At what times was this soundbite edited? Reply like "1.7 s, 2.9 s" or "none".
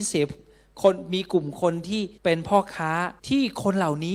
2.2 s, 3.2 s